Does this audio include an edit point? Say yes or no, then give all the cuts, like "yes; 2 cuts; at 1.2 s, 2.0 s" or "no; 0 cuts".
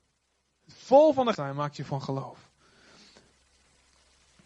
yes; 2 cuts; at 1.3 s, 1.9 s